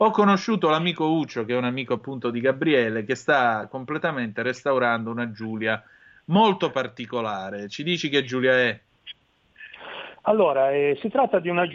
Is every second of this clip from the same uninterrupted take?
yes; 0 cuts

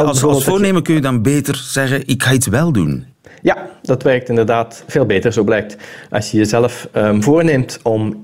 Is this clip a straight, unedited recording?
yes; 0 cuts

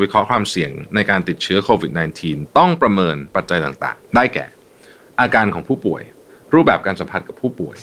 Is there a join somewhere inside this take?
yes; 1 cut; at 4.1 s

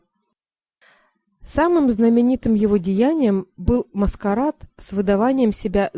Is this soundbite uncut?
yes; 0 cuts

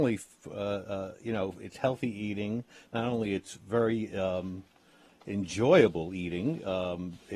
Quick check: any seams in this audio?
no; 0 cuts

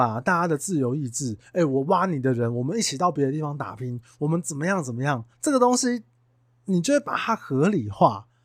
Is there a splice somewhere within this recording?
yes; 1 cut; at 5.3 s

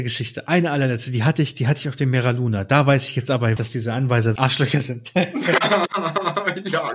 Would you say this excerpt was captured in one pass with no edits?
no; 2 cuts; at 3.6 s, 4.4 s

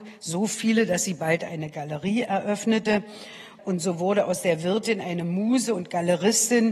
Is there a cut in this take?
no; 0 cuts

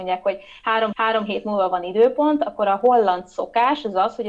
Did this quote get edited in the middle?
yes; 1 cut; at 0.9 s

